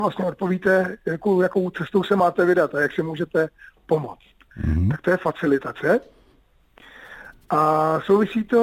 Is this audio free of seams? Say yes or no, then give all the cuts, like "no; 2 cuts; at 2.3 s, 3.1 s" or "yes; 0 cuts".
yes; 0 cuts